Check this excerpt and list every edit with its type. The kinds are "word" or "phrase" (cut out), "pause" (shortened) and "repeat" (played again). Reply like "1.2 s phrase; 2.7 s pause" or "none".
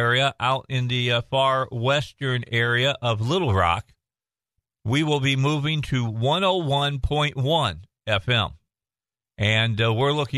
none